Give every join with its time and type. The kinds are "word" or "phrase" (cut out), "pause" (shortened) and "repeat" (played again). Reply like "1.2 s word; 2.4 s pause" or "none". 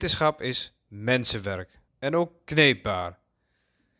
1.9 s pause